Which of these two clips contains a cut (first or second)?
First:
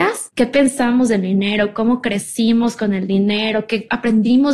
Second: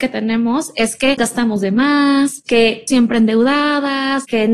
second